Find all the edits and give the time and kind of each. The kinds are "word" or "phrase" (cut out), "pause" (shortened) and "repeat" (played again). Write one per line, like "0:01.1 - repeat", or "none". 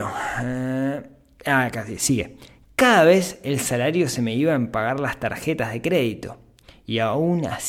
none